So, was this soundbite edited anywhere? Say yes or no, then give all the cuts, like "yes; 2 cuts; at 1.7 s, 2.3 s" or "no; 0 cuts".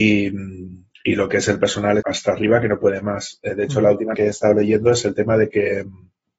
yes; 2 cuts; at 2.0 s, 4.1 s